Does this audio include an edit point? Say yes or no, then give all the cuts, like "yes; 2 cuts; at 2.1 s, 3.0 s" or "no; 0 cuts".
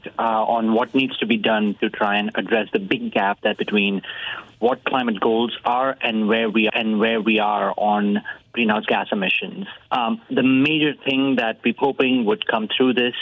yes; 5 cuts; at 3.5 s, 4.8 s, 6.7 s, 9.8 s, 11.8 s